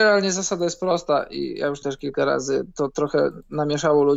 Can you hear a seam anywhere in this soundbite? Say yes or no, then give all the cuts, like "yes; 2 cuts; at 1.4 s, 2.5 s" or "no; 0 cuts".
yes; 1 cut; at 1.8 s